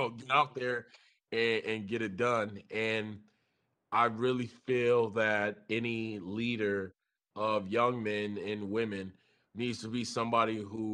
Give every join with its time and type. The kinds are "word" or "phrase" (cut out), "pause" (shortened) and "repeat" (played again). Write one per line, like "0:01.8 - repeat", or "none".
none

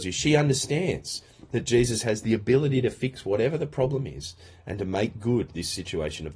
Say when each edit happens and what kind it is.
none

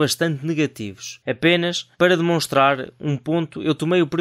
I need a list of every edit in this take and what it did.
0:01.9 - pause

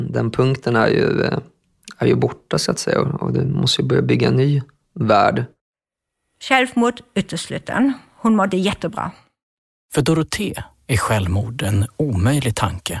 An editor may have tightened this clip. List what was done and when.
none

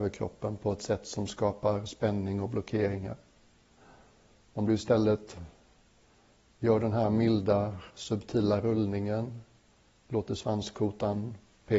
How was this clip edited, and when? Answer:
none

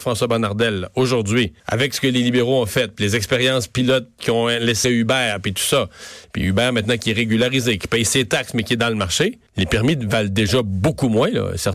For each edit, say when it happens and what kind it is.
0:01.6 - pause
0:04.8 - word
0:09.5 - pause

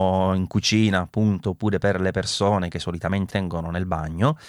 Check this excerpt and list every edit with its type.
0:03.3 - word

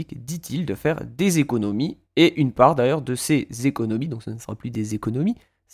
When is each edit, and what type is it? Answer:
none

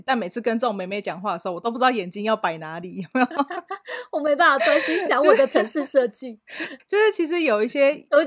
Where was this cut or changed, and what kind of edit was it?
0:06.8 - word

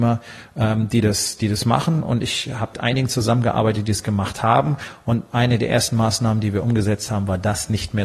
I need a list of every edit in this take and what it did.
0:02.7 - word

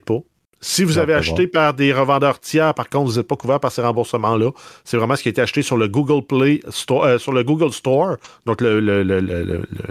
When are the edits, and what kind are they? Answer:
none

